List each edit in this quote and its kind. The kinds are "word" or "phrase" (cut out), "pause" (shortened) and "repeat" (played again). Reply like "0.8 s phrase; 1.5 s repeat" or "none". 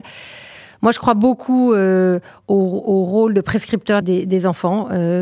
4.0 s word